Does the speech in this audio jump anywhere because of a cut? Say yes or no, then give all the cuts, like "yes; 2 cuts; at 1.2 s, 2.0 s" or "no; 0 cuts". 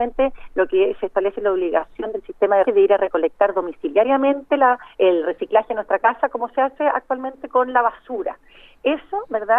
yes; 2 cuts; at 2.7 s, 4.9 s